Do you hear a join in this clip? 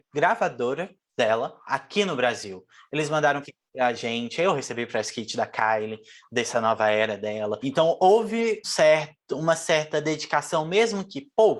yes; 3 cuts; at 1.6 s, 3.4 s, 8.6 s

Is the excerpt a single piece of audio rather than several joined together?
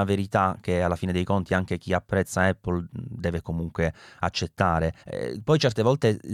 no; 1 cut; at 5.0 s

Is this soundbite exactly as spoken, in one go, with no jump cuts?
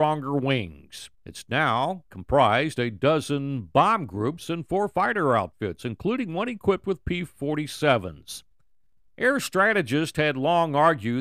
no; 1 cut; at 1.1 s

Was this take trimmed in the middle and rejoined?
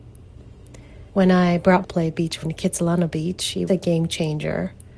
yes; 4 cuts; at 1.1 s, 1.8 s, 2.4 s, 3.7 s

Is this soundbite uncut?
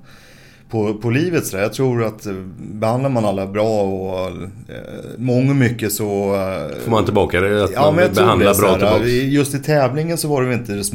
yes; 0 cuts

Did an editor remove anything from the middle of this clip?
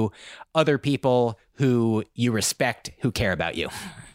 no; 0 cuts

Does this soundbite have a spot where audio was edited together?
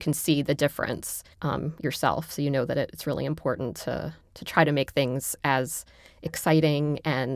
yes; 1 cut; at 1.3 s

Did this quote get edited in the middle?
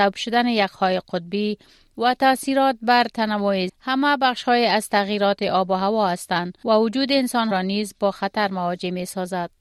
yes; 2 cuts; at 3.7 s, 7.5 s

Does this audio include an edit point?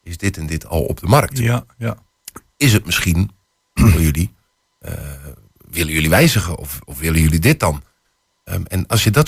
no; 0 cuts

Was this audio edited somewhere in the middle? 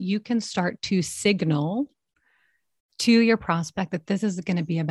no; 0 cuts

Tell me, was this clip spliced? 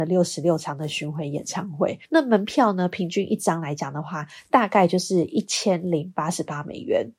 yes; 1 cut; at 2.0 s

